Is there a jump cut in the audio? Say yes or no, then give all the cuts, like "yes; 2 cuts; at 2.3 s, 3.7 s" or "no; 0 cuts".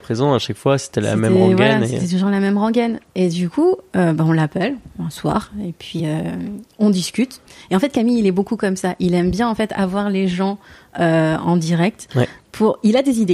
no; 0 cuts